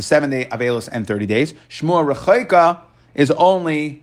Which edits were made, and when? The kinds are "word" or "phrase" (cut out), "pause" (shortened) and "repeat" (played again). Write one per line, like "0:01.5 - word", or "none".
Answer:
none